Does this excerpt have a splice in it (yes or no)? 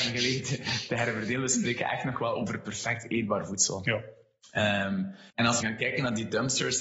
yes